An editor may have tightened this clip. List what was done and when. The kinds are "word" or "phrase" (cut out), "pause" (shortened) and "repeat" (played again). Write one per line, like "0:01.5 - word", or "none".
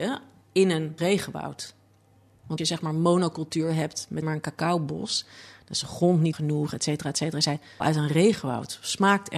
0:01.0 - word
0:02.6 - word
0:04.2 - word
0:06.3 - word
0:07.8 - word

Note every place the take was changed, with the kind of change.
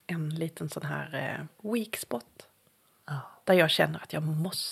0:01.6 - phrase

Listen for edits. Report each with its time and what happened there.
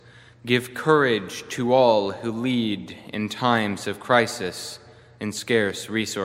none

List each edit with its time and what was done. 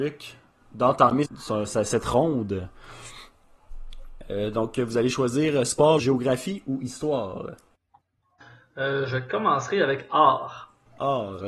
0:01.2 - word
0:06.0 - phrase

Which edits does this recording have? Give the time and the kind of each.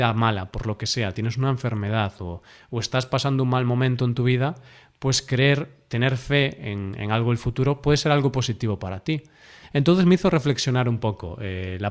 none

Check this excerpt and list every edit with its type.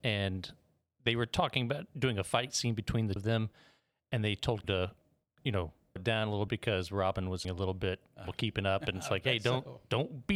0:03.2 - word
0:04.6 - word
0:06.0 - word
0:06.5 - word
0:07.4 - word
0:08.2 - word

